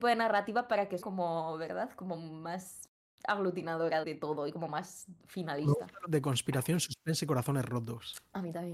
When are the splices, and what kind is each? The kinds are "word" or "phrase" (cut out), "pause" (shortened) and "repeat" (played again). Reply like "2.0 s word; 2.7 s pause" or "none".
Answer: 1.0 s word; 4.0 s word; 6.0 s phrase